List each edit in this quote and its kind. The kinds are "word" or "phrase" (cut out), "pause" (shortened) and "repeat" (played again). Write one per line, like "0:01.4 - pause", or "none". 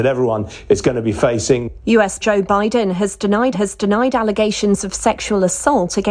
0:02.2 - word
0:03.5 - repeat

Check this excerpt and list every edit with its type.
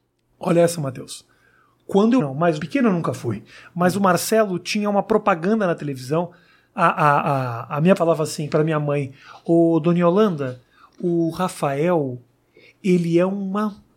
0:02.2 - phrase
0:02.6 - word
0:08.0 - word

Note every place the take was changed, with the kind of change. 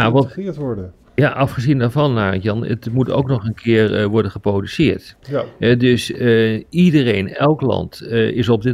0:05.2 - pause

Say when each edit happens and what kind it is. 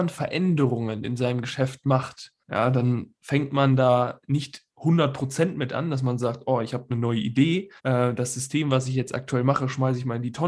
0:02.4 - pause
0:07.8 - pause

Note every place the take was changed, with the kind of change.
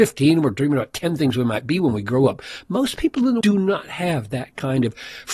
0:03.4 - word

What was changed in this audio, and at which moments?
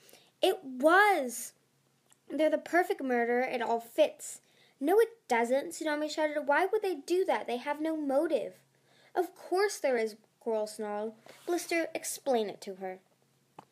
none

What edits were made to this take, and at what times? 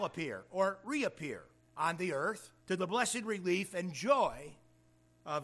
0:01.6 - pause
0:02.6 - pause

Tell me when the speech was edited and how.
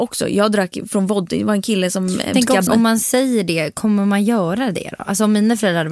0:02.3 - word
0:02.7 - word

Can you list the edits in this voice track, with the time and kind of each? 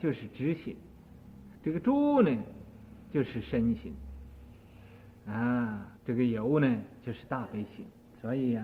0:01.6 - pause
0:06.0 - pause

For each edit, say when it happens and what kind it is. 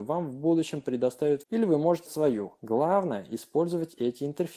0:01.4 - word
0:02.1 - word

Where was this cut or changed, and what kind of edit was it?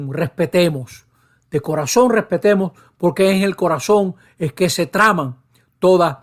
none

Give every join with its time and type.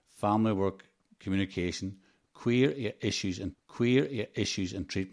0:03.5 - repeat

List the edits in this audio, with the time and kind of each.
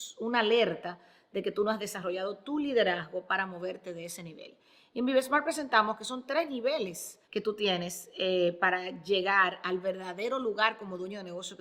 0:07.2 - pause

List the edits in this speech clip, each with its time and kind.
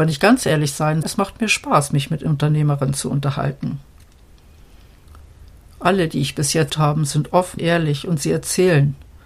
0:01.0 - word
0:06.7 - word
0:07.6 - word

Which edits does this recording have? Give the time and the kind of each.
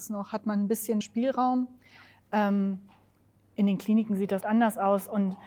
0:01.0 - word
0:04.4 - word

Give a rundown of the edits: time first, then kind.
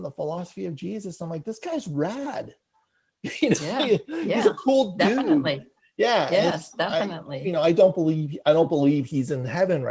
none

